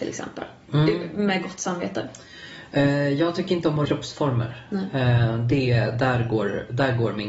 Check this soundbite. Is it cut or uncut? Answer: cut